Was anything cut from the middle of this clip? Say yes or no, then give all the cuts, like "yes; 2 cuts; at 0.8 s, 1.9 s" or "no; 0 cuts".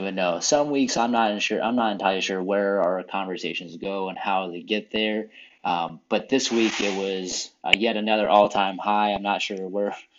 no; 0 cuts